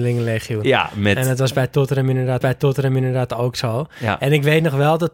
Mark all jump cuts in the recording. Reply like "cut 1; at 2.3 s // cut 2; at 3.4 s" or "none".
cut 1; at 2.4 s